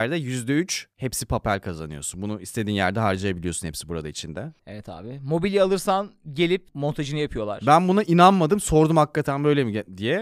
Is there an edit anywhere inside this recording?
no; 0 cuts

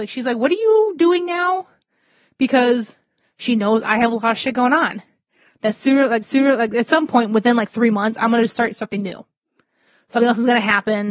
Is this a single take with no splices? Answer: no; 2 cuts; at 3.2 s, 6.2 s

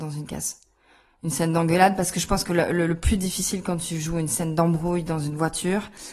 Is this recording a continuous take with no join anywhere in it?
yes; 0 cuts

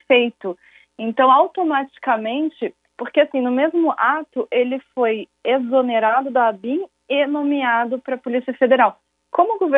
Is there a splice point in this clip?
no; 0 cuts

